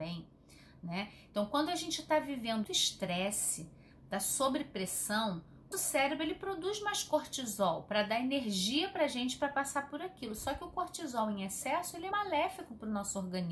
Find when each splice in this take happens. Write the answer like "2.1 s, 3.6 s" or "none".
2.6 s, 5.7 s, 12.1 s